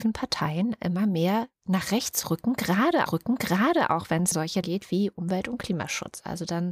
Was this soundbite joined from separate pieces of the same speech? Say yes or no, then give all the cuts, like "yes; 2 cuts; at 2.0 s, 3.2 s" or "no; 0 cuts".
yes; 3 cuts; at 3.1 s, 4.3 s, 4.6 s